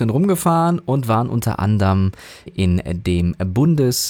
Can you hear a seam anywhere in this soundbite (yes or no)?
yes